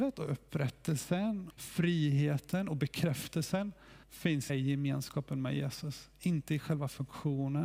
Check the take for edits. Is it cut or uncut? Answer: cut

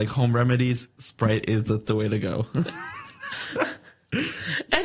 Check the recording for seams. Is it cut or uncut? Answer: cut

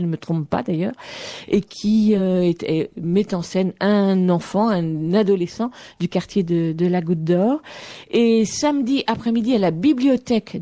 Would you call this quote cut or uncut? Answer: uncut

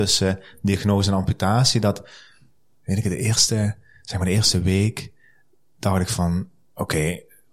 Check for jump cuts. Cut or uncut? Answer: uncut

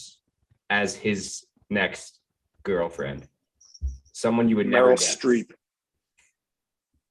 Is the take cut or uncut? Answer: uncut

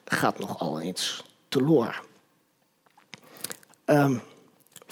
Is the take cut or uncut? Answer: uncut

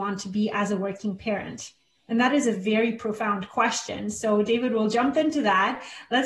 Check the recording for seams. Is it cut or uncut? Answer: uncut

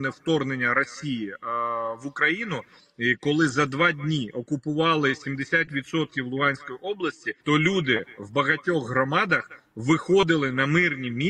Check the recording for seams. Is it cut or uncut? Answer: cut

